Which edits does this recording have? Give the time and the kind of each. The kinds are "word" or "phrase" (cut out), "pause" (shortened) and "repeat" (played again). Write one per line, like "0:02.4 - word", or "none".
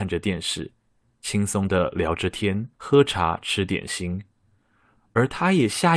0:02.7 - pause

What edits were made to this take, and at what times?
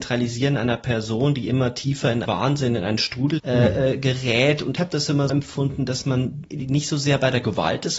0:02.2 - word
0:03.4 - word
0:04.8 - word
0:05.3 - word
0:06.5 - word

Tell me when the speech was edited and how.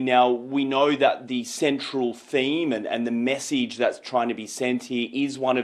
none

